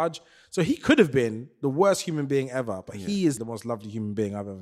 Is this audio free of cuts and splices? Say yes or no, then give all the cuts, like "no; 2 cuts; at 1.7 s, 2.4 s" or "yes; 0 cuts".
no; 1 cut; at 3.4 s